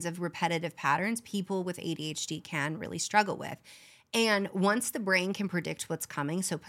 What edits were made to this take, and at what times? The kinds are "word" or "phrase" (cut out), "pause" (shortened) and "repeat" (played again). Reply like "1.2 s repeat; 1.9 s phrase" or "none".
none